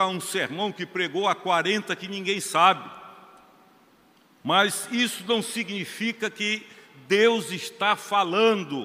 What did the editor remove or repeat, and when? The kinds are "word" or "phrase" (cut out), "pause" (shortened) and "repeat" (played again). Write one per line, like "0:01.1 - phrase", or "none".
none